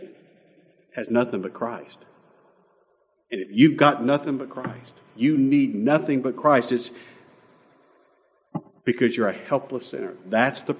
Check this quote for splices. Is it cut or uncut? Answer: uncut